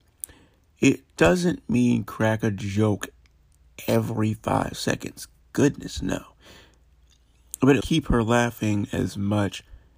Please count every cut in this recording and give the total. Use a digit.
1